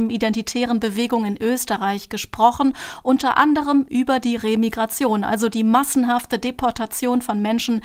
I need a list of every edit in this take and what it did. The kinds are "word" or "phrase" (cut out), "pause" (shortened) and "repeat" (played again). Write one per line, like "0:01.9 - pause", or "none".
none